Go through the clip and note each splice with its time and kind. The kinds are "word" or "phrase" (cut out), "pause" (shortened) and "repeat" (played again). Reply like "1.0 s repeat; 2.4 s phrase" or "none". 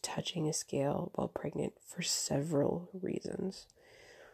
none